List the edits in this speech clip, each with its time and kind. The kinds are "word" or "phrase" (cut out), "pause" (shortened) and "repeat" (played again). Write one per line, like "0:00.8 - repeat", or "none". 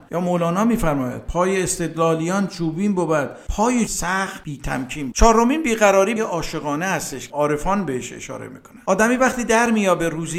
0:03.9 - word
0:05.1 - word
0:06.2 - word
0:07.3 - word